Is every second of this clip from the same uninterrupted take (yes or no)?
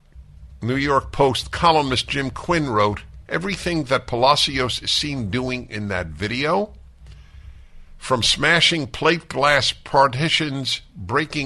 yes